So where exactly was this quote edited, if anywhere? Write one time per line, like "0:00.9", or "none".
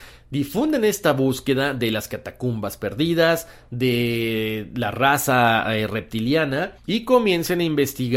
0:06.8